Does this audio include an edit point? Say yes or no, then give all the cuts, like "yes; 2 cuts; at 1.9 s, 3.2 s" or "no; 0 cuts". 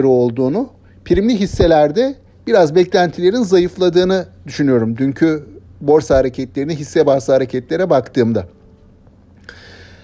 yes; 1 cut; at 5.7 s